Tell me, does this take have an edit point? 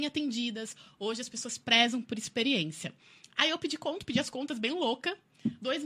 no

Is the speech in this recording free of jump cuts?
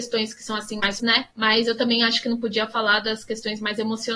no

